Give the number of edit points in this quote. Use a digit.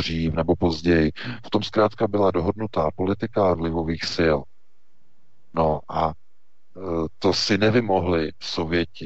1